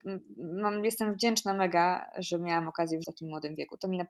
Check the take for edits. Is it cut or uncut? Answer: cut